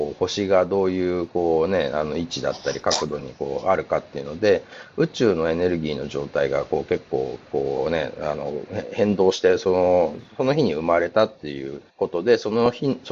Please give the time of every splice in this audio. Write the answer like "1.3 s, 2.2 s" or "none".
11.9 s